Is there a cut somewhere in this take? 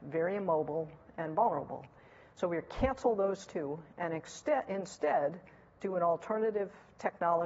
no; 0 cuts

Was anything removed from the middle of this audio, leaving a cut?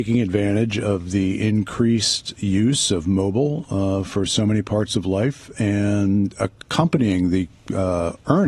no; 0 cuts

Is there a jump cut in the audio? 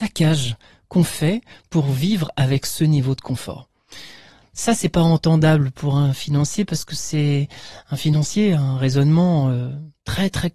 no; 0 cuts

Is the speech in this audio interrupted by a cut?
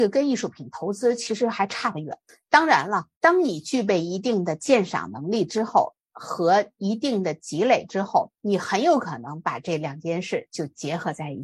no; 0 cuts

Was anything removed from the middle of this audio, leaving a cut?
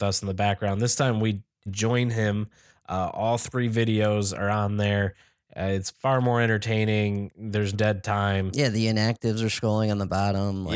yes; 2 cuts; at 1.7 s, 7.7 s

